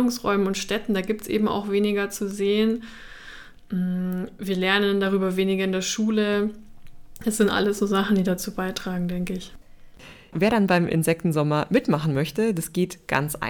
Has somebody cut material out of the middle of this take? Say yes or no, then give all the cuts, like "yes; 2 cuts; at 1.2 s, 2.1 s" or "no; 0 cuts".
no; 0 cuts